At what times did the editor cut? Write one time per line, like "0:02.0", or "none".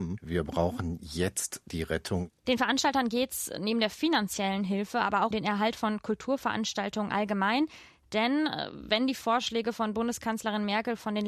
0:05.3